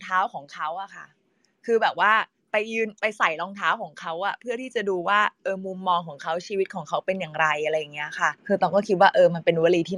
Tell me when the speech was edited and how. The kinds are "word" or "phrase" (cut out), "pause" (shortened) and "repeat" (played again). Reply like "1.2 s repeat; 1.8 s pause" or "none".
8.4 s pause